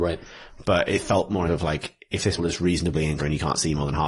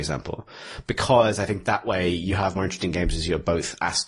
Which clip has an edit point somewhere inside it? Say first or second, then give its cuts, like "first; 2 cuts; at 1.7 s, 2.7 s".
first; 3 cuts; at 1.5 s, 2.4 s, 3.2 s